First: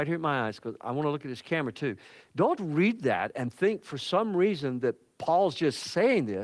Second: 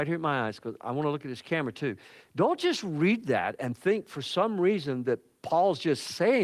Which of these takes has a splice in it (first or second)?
first